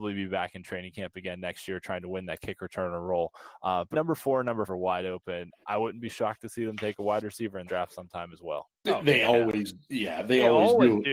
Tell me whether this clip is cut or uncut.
cut